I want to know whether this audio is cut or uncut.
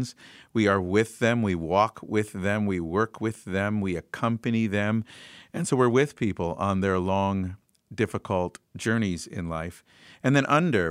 uncut